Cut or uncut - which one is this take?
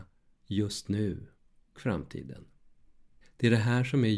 cut